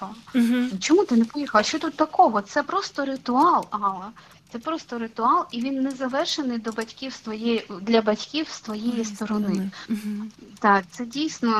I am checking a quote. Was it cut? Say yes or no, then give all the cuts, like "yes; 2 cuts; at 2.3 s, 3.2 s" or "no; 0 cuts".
no; 0 cuts